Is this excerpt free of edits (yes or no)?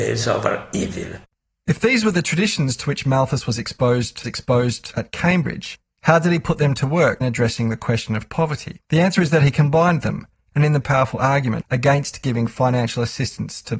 no